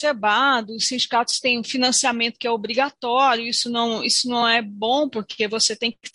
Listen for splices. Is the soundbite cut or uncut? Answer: uncut